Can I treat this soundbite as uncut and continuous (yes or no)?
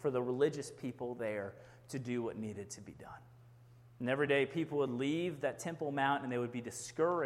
yes